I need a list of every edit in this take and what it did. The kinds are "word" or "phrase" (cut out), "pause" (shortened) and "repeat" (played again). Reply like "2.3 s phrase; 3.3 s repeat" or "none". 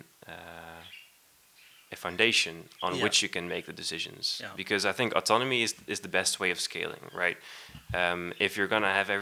none